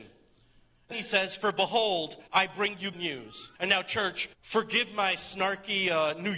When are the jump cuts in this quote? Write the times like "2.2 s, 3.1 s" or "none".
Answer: 0.9 s, 2.3 s, 2.9 s, 3.6 s, 4.3 s